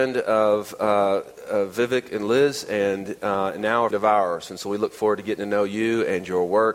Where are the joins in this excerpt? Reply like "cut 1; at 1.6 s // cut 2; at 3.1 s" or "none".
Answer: cut 1; at 3.9 s